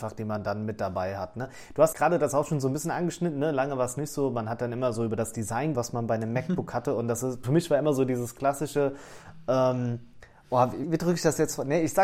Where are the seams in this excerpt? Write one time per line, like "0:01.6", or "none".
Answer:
0:01.9
0:05.7
0:07.4
0:10.8